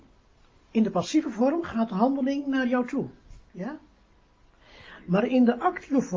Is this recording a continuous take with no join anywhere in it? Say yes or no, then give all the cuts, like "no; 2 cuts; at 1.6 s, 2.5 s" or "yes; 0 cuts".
no; 1 cut; at 3.5 s